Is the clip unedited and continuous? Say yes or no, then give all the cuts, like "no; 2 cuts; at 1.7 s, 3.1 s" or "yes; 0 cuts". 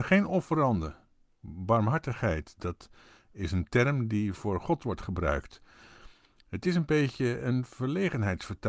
yes; 0 cuts